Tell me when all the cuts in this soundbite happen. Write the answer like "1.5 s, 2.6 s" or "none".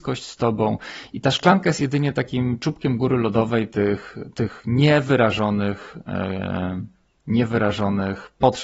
none